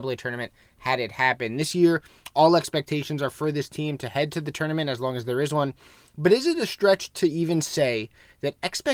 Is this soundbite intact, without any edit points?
yes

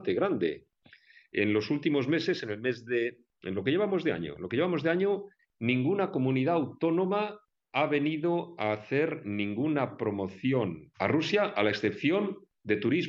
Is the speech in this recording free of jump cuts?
yes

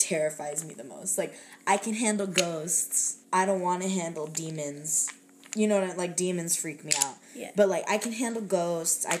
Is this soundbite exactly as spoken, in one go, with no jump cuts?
no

